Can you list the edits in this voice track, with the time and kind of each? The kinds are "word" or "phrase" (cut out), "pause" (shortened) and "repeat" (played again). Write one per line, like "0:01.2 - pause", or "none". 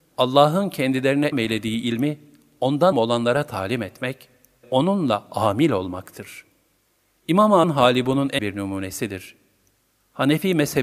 0:01.3 - word
0:02.9 - word
0:04.6 - word
0:07.6 - word
0:08.4 - word

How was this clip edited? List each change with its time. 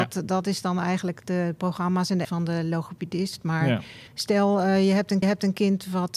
0:02.2 - word
0:04.1 - pause
0:05.2 - repeat

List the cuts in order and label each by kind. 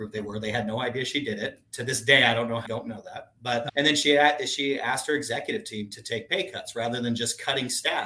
0:02.6 - word

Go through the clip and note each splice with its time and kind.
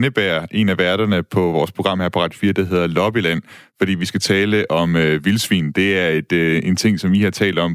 none

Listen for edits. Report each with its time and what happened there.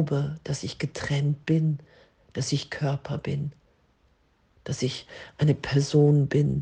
none

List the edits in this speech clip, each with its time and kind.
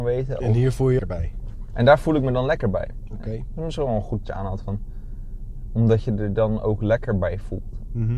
0:01.0 - phrase
0:04.2 - phrase

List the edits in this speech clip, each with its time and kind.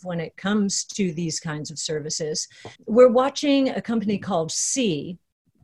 0:02.8 - pause

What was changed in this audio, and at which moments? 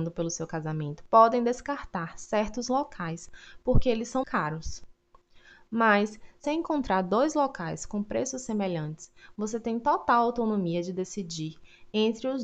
0:04.2 - word
0:06.4 - word

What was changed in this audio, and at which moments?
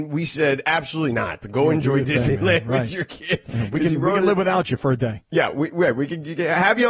none

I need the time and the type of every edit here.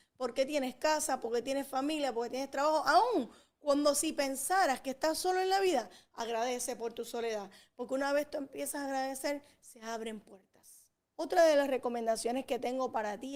0:11.1 - pause

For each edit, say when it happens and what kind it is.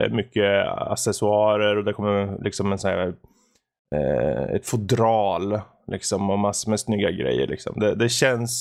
none

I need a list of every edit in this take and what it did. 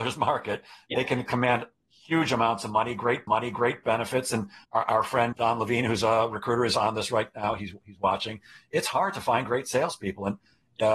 0:03.3 - repeat
0:04.6 - word
0:05.3 - word

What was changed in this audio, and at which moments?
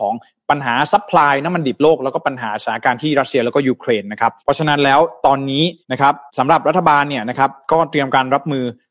0:04.4 - pause
0:05.8 - pause
0:06.3 - pause

